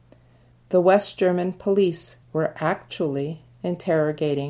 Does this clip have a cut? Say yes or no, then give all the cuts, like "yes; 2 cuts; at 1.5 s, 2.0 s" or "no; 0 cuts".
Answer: yes; 1 cut; at 2.2 s